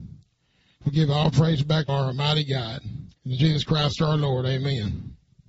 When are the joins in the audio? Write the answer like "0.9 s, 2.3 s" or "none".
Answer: 1.9 s, 3.2 s